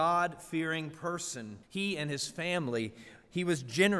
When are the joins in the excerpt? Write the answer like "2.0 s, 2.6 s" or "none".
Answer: 1.6 s